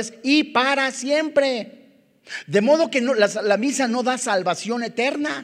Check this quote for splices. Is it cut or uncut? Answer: uncut